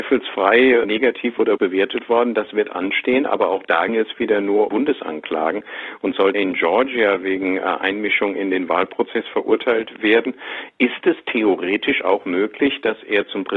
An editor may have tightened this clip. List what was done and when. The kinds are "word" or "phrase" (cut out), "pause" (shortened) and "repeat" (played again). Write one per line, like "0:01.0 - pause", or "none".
0:01.6 - word
0:03.9 - word
0:04.7 - word
0:06.3 - word